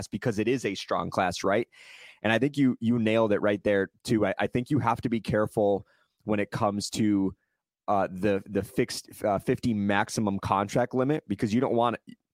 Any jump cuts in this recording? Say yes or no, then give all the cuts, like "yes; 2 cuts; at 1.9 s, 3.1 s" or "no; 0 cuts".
no; 0 cuts